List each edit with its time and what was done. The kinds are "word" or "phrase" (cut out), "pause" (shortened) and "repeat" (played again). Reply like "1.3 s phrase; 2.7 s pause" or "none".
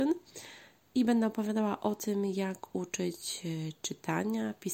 none